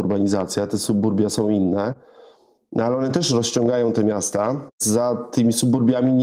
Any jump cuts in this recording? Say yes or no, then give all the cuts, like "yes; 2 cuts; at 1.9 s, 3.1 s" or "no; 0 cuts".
no; 0 cuts